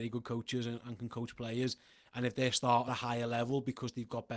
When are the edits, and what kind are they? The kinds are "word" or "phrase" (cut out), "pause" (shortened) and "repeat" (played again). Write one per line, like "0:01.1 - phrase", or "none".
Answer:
0:02.9 - word